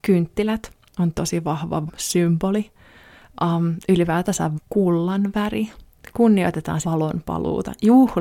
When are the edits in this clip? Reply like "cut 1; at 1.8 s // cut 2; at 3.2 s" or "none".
cut 1; at 1.2 s // cut 2; at 1.9 s // cut 3; at 4.6 s // cut 4; at 6.8 s